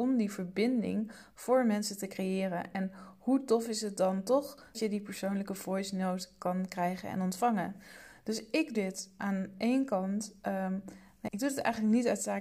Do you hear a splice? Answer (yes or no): yes